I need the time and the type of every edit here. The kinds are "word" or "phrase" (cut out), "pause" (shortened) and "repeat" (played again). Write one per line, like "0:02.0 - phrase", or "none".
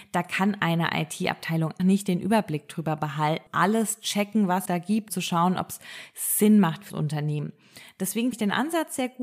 0:01.8 - word
0:03.5 - word
0:04.7 - word
0:05.1 - word
0:06.9 - word
0:08.3 - word